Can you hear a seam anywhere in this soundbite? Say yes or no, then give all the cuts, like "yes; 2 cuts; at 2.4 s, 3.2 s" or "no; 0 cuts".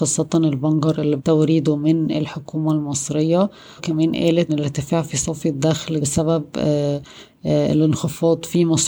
yes; 4 cuts; at 1.2 s, 3.8 s, 4.5 s, 6.0 s